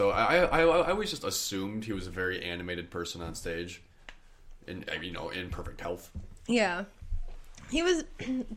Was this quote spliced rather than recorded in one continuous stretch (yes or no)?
no